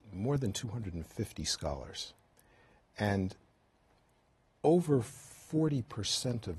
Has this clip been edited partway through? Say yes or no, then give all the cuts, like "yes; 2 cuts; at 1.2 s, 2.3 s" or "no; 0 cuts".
no; 0 cuts